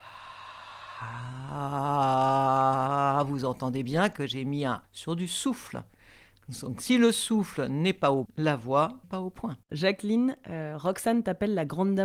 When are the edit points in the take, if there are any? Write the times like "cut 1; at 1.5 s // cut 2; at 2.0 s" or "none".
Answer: cut 1; at 4.8 s // cut 2; at 8.3 s // cut 3; at 9.0 s // cut 4; at 9.6 s